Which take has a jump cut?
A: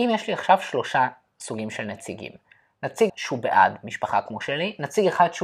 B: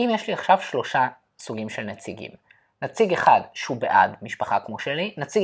A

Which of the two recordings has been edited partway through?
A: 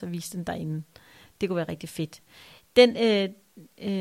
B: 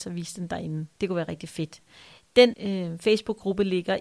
B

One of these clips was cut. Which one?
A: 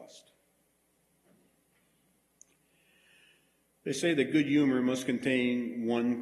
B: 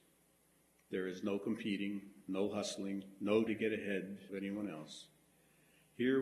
B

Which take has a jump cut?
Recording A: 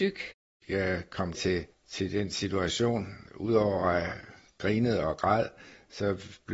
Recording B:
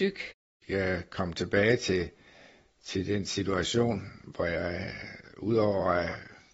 A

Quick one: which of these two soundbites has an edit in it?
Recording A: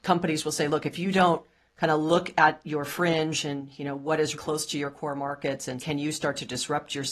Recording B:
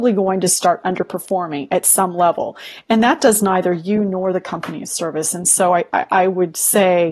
A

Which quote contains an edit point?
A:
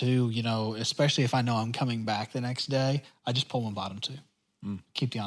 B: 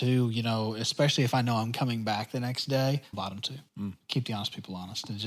B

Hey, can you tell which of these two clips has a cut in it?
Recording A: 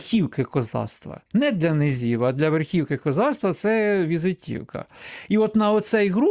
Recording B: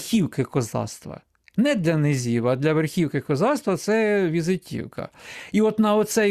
A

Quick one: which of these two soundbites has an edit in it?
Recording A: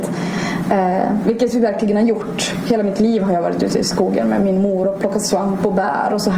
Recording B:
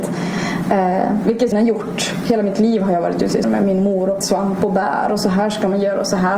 B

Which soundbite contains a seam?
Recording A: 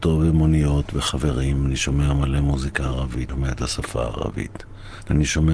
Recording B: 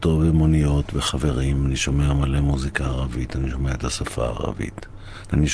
A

